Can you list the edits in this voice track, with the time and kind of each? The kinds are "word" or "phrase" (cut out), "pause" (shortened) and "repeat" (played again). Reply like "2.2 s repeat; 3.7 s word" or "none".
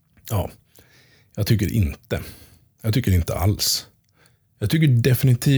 none